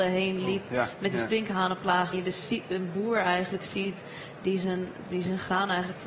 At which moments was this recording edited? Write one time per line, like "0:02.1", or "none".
0:02.1